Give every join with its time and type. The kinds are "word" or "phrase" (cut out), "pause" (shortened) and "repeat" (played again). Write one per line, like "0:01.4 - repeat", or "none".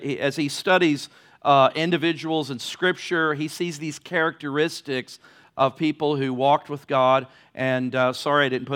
none